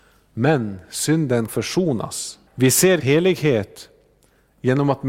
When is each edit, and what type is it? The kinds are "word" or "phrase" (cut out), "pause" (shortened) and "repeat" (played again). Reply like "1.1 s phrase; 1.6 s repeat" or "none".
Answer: 1.5 s word; 2.5 s pause; 3.0 s word